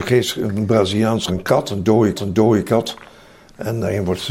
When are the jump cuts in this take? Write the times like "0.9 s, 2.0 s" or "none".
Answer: 1.3 s, 2.1 s